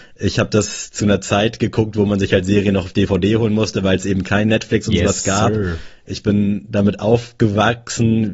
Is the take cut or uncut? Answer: uncut